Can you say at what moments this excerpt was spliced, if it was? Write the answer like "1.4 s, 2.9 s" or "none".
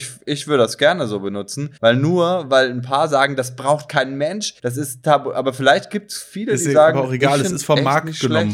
1.8 s, 4.6 s